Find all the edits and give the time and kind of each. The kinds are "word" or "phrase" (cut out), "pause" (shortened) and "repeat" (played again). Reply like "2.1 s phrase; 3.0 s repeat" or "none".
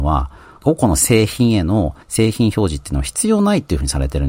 2.0 s pause

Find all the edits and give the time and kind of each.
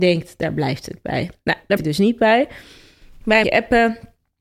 1.8 s word; 3.4 s word

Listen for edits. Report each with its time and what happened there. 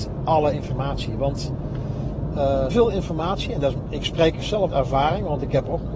2.7 s word; 4.7 s word

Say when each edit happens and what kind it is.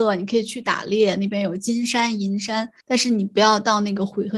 2.8 s pause

